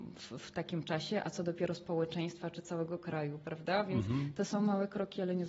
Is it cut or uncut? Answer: uncut